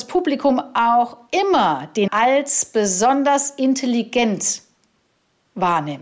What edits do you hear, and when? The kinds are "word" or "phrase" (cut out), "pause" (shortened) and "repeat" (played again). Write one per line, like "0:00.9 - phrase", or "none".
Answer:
0:02.1 - word

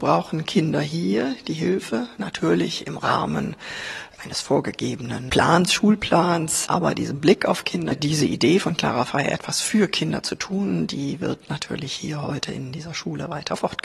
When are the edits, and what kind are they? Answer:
none

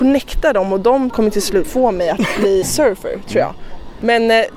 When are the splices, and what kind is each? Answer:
0:01.1 - word
0:01.6 - word
0:02.6 - word

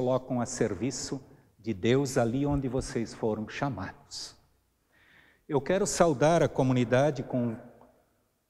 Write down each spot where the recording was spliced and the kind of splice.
none

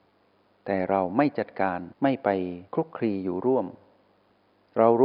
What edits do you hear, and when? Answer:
0:01.9 - pause
0:02.7 - pause

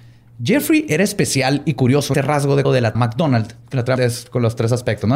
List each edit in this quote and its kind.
0:02.1 - word
0:02.6 - word
0:02.9 - word
0:04.0 - word

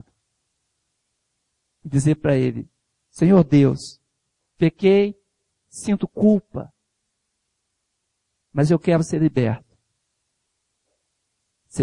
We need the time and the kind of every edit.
none

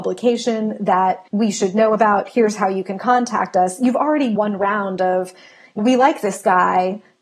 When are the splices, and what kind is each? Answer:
0:01.3 - pause
0:04.4 - word
0:05.8 - word

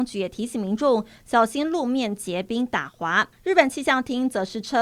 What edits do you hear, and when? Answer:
0:03.3 - pause

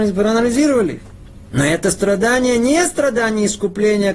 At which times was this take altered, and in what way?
none

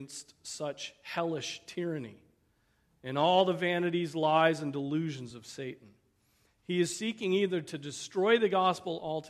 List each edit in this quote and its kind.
none

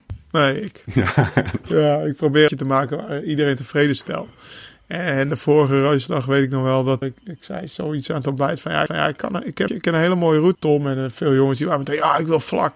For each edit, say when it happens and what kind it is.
0:02.5 - phrase
0:07.0 - word
0:08.9 - repeat
0:09.7 - phrase
0:10.5 - word

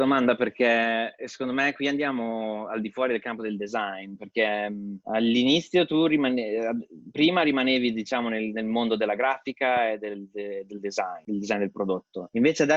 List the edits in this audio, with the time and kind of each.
none

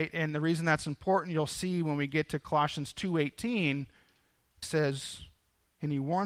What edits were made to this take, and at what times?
0:04.6 - phrase

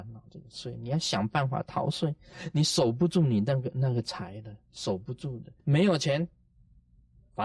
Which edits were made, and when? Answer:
0:05.6 - pause

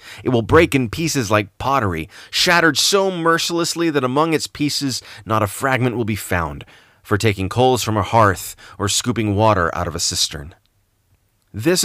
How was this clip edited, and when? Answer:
none

